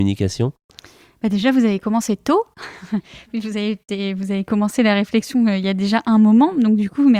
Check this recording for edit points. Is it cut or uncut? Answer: uncut